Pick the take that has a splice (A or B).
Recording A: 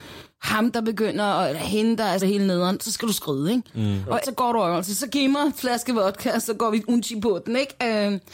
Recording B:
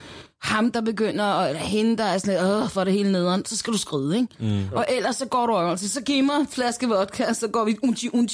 A